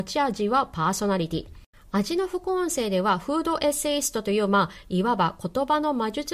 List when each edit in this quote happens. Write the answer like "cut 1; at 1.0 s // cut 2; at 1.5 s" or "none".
cut 1; at 1.7 s